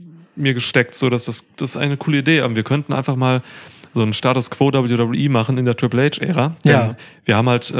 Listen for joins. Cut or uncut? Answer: uncut